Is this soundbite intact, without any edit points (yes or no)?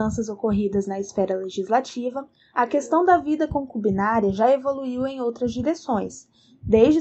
yes